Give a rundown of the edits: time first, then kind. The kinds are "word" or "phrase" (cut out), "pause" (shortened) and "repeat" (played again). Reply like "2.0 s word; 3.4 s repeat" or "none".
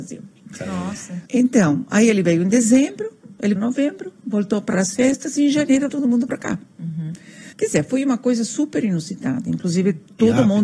1.3 s pause; 3.6 s word; 4.7 s phrase; 5.9 s word; 7.5 s pause